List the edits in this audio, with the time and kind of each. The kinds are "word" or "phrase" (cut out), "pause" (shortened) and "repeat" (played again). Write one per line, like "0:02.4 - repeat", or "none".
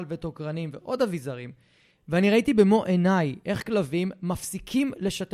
none